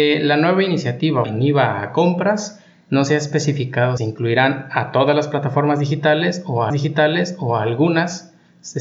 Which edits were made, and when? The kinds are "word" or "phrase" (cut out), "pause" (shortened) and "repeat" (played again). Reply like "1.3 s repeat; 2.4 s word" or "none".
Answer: 1.2 s word; 4.0 s word; 6.7 s repeat